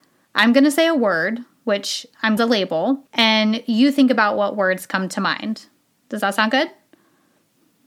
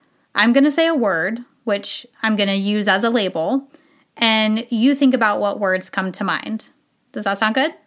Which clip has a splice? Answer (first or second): first